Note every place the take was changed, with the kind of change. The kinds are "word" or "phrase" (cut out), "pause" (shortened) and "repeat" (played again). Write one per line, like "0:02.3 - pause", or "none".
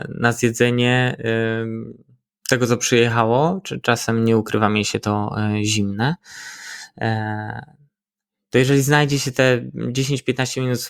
none